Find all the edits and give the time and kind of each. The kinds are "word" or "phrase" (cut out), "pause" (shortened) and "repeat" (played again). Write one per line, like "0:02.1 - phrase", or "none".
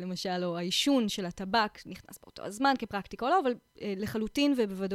0:03.7 - pause